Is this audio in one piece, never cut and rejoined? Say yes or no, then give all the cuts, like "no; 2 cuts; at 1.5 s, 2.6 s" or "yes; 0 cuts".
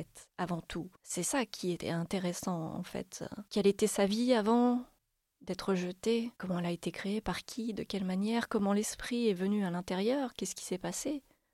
no; 3 cuts; at 0.9 s, 3.5 s, 6.4 s